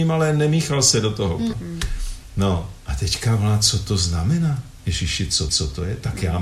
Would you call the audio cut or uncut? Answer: cut